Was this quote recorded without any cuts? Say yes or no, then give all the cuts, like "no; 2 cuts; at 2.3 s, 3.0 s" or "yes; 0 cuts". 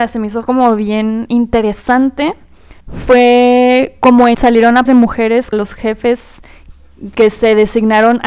no; 4 cuts; at 2.8 s, 4.3 s, 4.9 s, 5.5 s